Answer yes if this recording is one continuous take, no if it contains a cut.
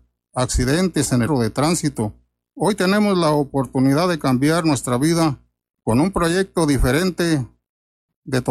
no